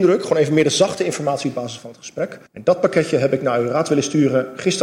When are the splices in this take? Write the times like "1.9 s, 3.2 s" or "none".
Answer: 2.5 s

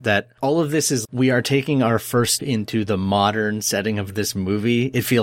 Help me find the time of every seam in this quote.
1.0 s, 2.4 s

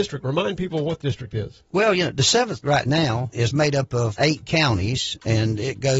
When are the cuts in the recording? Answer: 1.0 s, 2.6 s, 3.3 s, 4.2 s

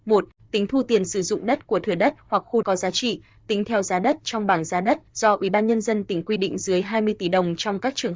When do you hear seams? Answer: 2.6 s, 5.1 s

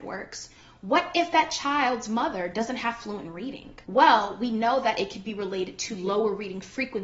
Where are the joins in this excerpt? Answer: 3.8 s

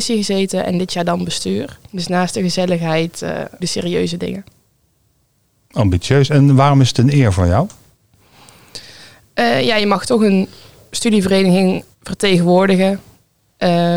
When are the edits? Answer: 1.9 s, 3.6 s, 11.9 s

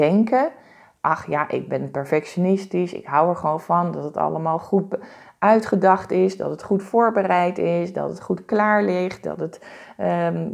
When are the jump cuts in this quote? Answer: none

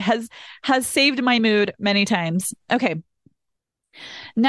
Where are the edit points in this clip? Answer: none

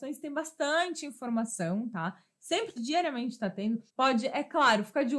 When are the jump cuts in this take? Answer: 2.8 s, 3.9 s

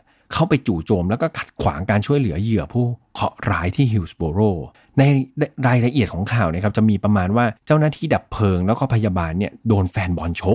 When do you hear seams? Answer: 4.7 s, 7.6 s

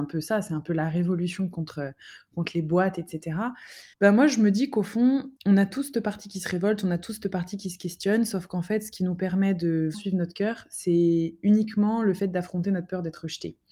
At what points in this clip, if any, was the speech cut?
3.9 s, 5.4 s, 9.9 s

